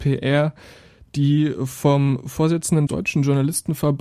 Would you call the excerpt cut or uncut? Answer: cut